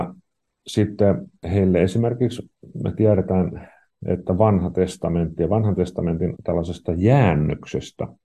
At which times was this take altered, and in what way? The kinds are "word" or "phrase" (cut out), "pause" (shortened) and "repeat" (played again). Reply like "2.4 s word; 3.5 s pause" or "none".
6.3 s word